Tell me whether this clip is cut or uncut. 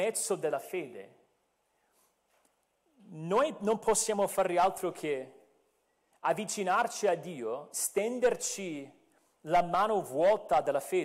uncut